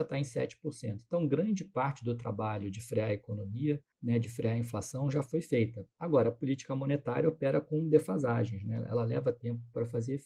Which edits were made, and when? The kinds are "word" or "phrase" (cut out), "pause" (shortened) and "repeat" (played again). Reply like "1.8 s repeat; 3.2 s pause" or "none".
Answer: 3.9 s pause